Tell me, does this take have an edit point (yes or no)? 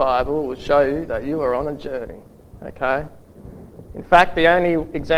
no